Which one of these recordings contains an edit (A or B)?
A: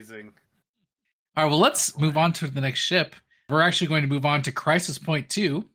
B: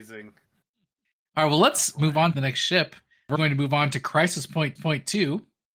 B